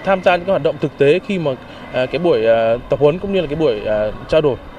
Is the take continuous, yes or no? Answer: yes